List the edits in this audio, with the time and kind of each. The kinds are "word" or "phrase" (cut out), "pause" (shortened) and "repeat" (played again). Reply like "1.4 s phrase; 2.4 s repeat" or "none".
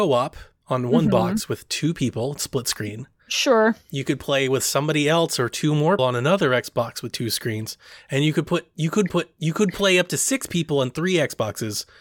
6.0 s word; 9.1 s repeat